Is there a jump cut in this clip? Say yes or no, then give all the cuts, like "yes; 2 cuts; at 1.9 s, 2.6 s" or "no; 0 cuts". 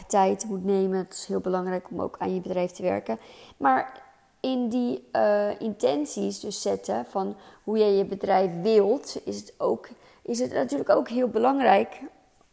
no; 0 cuts